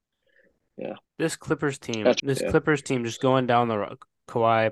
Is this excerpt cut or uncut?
cut